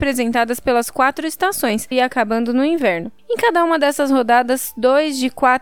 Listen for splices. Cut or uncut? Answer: cut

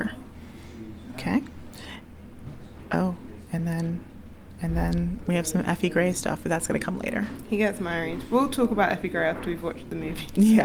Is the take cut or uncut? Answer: uncut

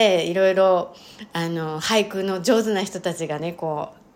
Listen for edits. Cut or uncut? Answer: uncut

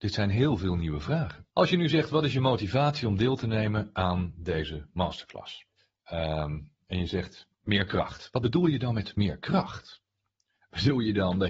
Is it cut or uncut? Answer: cut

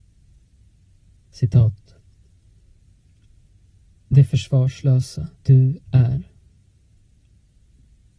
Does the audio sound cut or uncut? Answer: cut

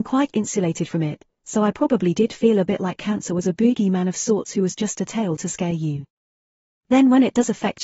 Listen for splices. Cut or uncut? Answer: uncut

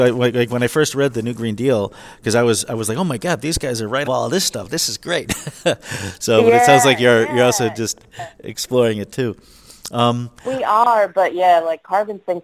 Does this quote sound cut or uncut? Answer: cut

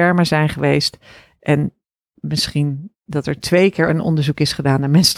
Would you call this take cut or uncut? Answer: uncut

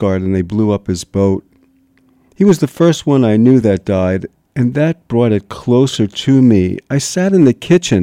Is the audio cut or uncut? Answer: uncut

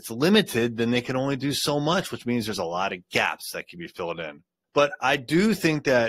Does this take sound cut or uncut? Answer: uncut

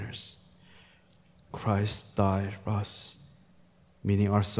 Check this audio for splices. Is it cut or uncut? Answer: cut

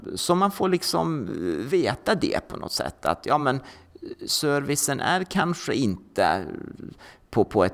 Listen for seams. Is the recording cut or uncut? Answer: uncut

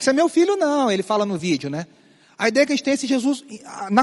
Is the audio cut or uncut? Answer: uncut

